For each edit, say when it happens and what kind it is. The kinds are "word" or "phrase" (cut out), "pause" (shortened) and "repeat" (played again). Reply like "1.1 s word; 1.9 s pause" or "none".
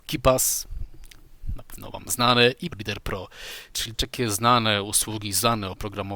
2.7 s word; 3.9 s word